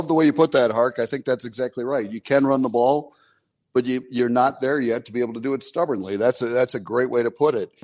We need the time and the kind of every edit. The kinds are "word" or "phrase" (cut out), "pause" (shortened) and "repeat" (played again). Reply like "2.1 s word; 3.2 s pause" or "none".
none

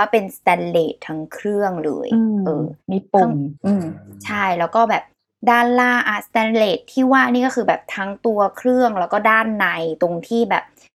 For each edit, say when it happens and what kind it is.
3.6 s pause

